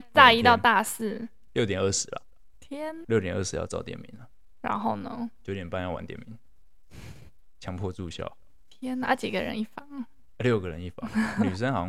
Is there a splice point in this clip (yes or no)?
yes